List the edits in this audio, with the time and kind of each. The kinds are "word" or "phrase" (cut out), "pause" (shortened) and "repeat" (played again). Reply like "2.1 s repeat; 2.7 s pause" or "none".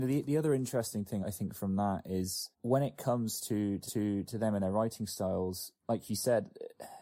1.2 s word; 2.5 s pause; 3.9 s repeat; 5.8 s pause